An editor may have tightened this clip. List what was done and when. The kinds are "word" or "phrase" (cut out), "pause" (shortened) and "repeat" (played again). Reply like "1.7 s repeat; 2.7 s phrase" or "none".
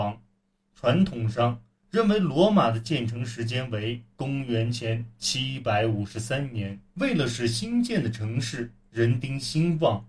6.9 s pause

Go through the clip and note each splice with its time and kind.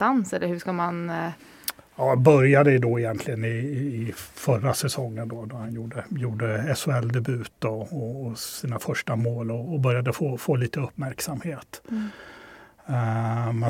none

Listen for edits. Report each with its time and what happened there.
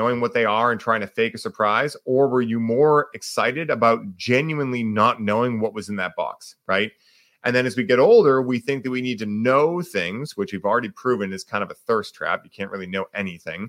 none

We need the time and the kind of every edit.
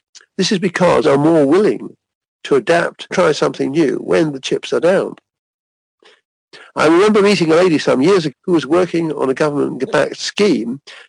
1.0 s word; 3.1 s word; 8.3 s word

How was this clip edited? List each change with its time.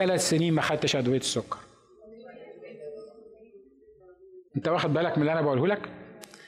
4.5 s pause

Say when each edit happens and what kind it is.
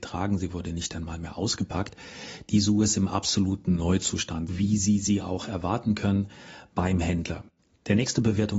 4.5 s word

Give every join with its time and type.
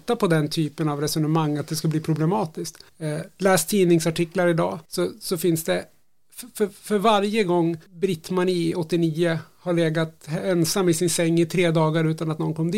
2.9 s pause; 4.8 s pause; 7.9 s pause

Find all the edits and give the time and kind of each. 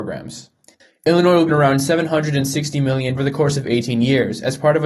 1.5 s word; 3.2 s word

